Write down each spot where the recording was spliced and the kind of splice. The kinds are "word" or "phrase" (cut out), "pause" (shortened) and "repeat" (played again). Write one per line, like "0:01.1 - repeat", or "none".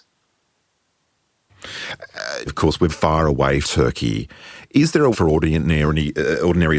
0:02.5 - word
0:02.9 - word
0:03.6 - word
0:05.1 - word